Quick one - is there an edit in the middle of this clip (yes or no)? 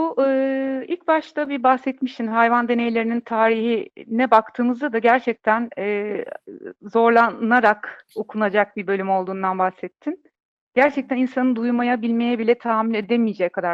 no